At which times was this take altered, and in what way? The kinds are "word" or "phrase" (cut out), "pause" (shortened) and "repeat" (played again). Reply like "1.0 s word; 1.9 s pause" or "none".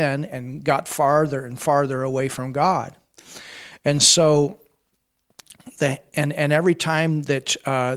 none